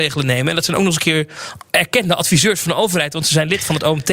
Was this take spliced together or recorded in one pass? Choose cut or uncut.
cut